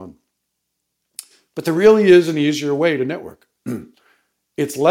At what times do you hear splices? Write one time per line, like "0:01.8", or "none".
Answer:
none